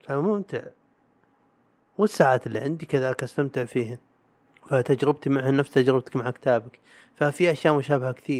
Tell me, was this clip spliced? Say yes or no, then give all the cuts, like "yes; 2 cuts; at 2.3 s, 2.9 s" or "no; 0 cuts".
yes; 1 cut; at 4.5 s